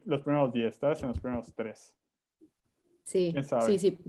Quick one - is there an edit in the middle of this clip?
no; 0 cuts

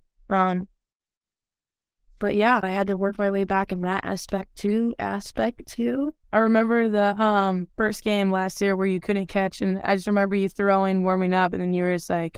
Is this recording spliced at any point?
yes; 3 cuts; at 2.6 s, 6.2 s, 7.7 s

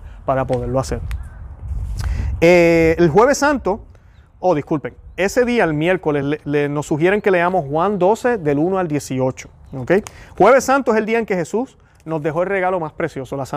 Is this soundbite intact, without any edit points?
yes; 0 cuts

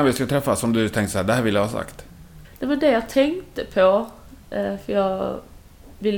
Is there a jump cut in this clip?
no; 0 cuts

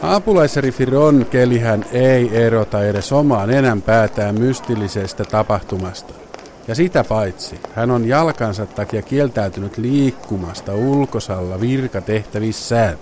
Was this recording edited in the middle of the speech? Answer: no; 0 cuts

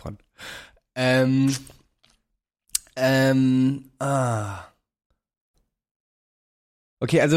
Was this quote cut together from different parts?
no; 0 cuts

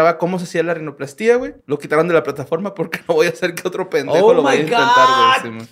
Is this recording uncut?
no; 1 cut; at 1.6 s

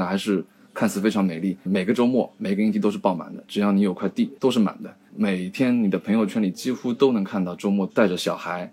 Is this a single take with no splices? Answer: no; 2 cuts; at 1.7 s, 4.4 s

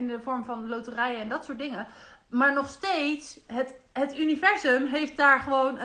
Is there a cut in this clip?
no; 0 cuts

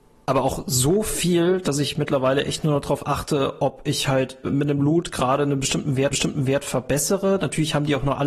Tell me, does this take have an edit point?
yes; 2 cuts; at 4.4 s, 6.1 s

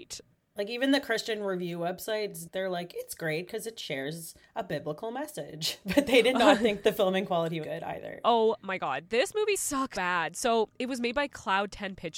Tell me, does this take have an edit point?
yes; 2 cuts; at 7.6 s, 9.9 s

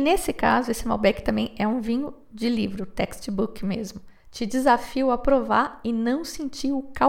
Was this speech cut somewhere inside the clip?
yes; 1 cut; at 4.2 s

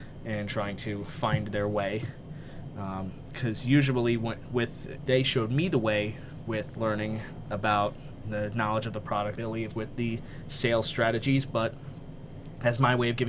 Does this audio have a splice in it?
yes; 5 cuts; at 5.1 s, 6.7 s, 8.2 s, 9.3 s, 9.7 s

